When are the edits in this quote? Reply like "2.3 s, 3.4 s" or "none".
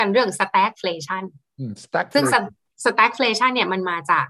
none